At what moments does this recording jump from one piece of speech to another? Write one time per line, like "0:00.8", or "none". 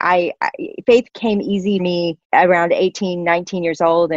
0:01.1
0:01.8
0:02.2